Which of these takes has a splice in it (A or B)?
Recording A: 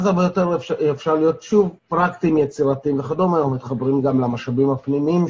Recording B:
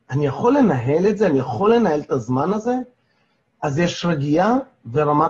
A